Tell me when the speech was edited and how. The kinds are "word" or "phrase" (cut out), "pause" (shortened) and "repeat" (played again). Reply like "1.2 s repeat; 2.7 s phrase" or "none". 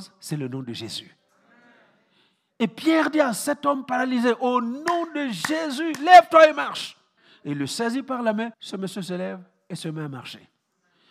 7.2 s pause; 8.5 s pause